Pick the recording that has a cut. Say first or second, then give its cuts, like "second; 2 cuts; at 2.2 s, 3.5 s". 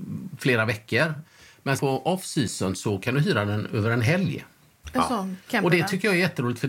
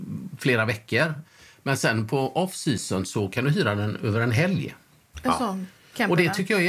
first; 2 cuts; at 1.8 s, 5.4 s